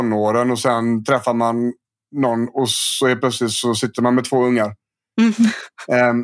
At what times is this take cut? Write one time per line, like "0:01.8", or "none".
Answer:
none